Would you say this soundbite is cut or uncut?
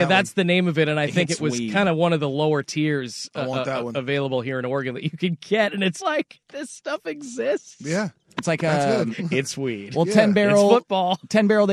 cut